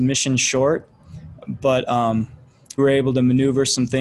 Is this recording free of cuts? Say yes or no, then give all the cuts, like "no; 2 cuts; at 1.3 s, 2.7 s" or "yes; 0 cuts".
no; 1 cut; at 2.8 s